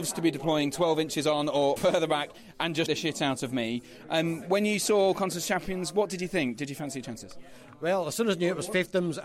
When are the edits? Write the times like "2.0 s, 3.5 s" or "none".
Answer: 1.8 s, 2.9 s

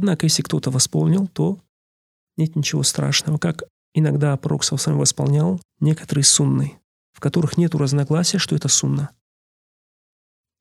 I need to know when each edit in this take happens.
5.7 s

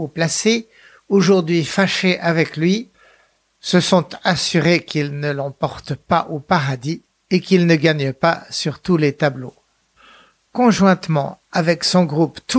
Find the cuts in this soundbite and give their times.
none

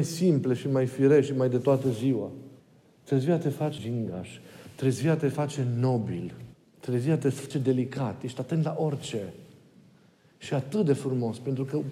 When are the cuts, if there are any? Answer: 2.6 s, 3.8 s, 6.5 s, 7.5 s

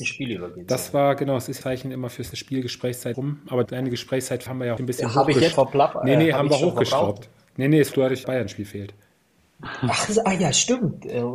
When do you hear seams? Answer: 1.6 s, 2.3 s, 3.1 s, 3.7 s, 4.5 s, 4.8 s, 5.5 s, 7.9 s, 8.2 s

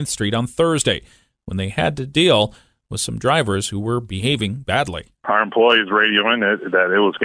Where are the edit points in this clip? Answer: none

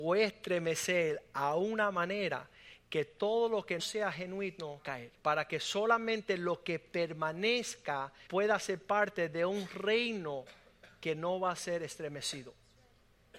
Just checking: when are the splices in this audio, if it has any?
3.8 s, 4.8 s, 5.2 s, 8.3 s

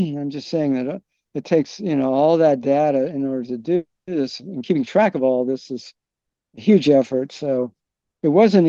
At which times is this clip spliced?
none

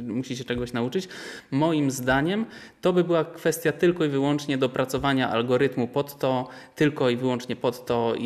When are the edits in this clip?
none

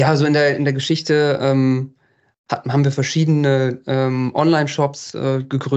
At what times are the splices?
none

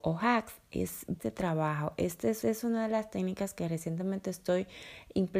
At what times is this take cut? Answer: 1.2 s, 2.4 s

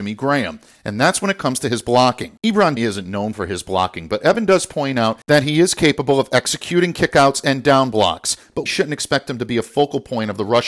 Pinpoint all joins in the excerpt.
2.8 s, 8.7 s

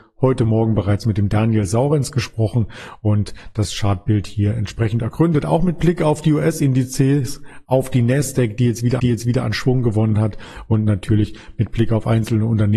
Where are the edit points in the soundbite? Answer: 9.0 s

